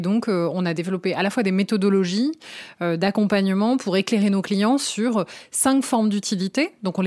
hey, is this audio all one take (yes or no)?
yes